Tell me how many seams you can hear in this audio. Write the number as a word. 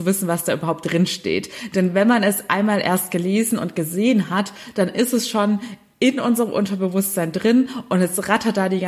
zero